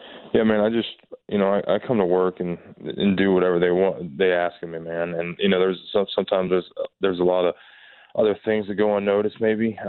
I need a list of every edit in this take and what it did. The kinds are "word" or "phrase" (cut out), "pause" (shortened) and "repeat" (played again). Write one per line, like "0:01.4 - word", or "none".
none